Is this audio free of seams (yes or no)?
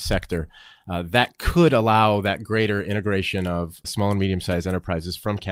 no